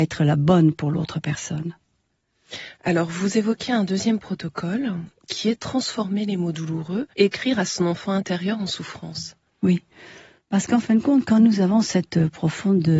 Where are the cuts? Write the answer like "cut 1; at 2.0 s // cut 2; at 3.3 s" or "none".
cut 1; at 7.1 s